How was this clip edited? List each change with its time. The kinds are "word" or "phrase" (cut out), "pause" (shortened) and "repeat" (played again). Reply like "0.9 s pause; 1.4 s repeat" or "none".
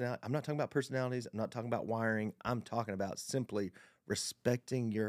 none